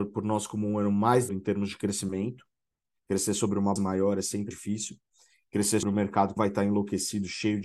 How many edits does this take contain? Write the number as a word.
five